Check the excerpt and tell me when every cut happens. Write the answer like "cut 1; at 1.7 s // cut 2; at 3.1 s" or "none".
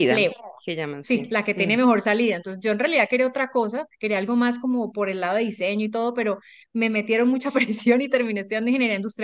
none